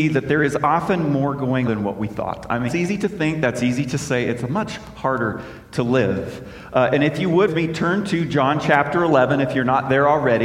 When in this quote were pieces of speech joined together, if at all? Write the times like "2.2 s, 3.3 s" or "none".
1.7 s, 2.7 s, 7.5 s